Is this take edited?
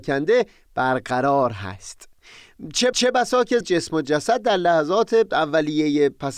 yes; 2 cuts; at 2.9 s, 3.6 s

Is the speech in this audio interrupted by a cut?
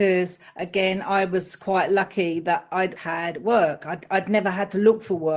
yes; 1 cut; at 3.0 s

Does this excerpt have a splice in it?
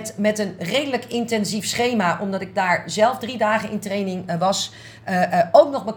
no; 0 cuts

